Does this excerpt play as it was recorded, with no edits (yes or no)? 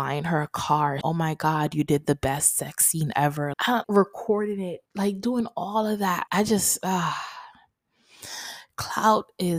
no